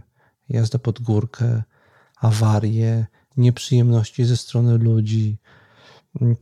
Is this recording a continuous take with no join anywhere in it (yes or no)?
yes